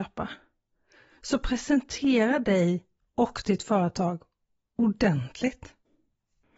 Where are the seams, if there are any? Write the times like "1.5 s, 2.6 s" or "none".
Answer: none